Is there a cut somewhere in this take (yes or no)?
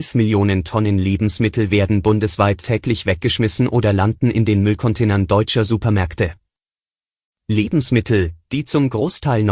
no